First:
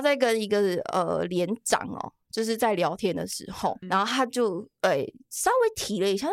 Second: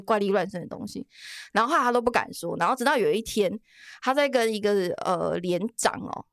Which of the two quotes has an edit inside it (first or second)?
first